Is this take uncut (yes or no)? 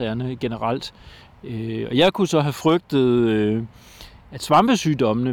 yes